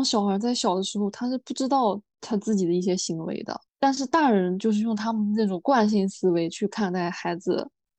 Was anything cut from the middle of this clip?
yes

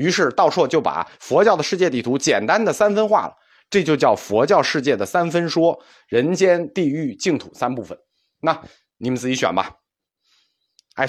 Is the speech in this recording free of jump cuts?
yes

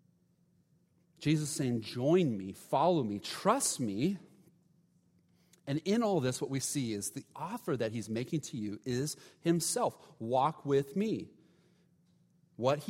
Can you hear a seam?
no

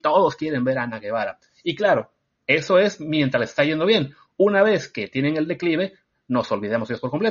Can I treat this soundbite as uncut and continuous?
yes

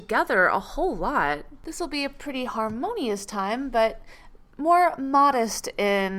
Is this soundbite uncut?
yes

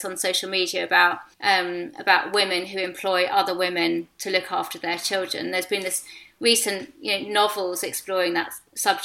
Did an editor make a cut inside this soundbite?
yes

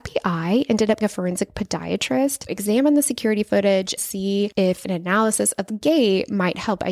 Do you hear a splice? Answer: yes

